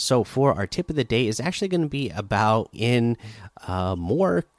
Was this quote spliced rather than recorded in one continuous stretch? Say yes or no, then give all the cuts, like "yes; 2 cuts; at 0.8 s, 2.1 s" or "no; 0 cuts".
yes; 1 cut; at 2.7 s